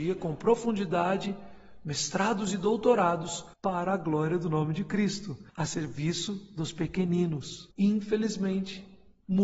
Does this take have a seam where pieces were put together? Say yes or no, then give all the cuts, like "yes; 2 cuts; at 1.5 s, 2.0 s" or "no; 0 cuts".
yes; 3 cuts; at 3.5 s, 5.5 s, 7.7 s